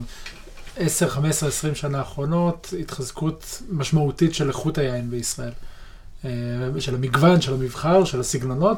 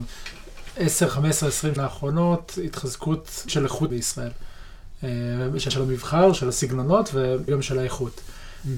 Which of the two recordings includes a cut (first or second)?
second